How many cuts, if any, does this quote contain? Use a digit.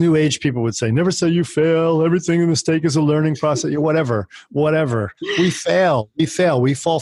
1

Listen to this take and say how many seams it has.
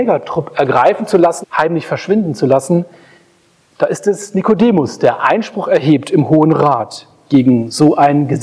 1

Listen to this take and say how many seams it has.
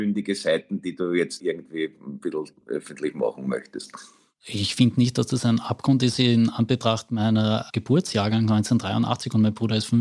0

